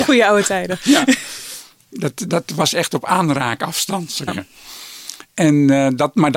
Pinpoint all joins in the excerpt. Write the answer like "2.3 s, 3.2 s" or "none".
2.3 s, 4.3 s